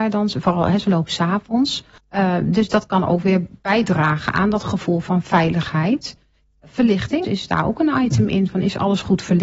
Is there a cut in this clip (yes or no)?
yes